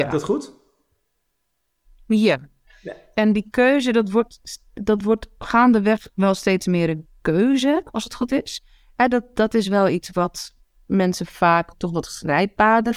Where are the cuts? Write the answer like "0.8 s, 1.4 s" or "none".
none

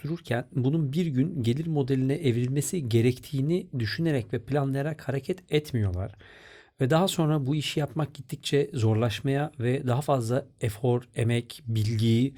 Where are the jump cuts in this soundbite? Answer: none

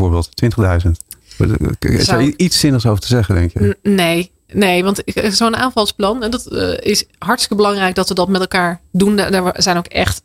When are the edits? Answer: none

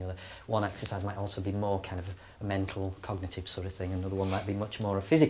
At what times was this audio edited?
none

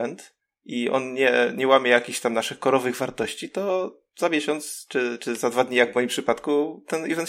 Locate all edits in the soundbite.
none

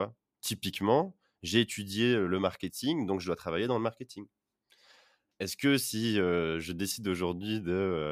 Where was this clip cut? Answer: none

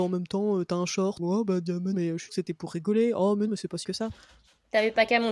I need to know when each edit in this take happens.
1.2 s, 1.9 s, 2.3 s, 3.5 s, 3.8 s

